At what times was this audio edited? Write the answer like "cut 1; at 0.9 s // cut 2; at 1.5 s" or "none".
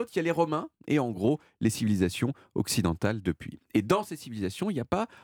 none